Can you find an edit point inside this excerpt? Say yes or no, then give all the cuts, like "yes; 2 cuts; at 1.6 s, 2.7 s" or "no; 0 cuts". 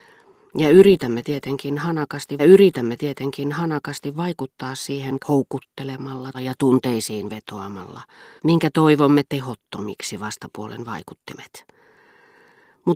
yes; 5 cuts; at 2.4 s, 5.2 s, 6.3 s, 8.4 s, 9.3 s